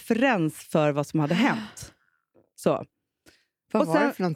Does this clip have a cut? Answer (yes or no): no